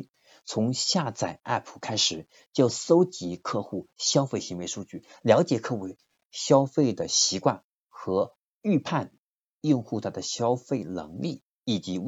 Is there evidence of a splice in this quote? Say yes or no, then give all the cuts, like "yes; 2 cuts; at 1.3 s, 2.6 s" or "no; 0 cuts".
no; 0 cuts